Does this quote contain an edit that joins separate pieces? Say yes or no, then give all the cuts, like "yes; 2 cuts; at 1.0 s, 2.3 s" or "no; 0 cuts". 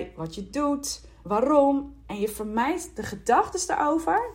yes; 1 cut; at 1.2 s